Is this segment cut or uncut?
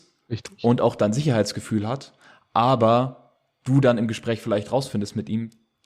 uncut